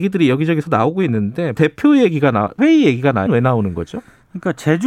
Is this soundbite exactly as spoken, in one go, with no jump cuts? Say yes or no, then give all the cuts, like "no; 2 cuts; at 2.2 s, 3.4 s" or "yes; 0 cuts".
no; 3 cuts; at 1.6 s, 2.6 s, 3.3 s